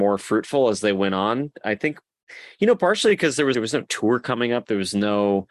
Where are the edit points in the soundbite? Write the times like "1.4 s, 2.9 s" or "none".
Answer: 3.5 s